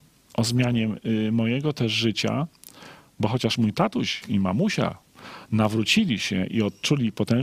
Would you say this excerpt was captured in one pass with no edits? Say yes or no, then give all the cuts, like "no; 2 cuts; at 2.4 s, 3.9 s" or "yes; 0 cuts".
yes; 0 cuts